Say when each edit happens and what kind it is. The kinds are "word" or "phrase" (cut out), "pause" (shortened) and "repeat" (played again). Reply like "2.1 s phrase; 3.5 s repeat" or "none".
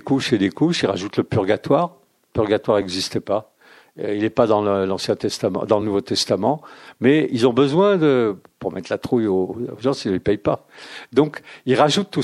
none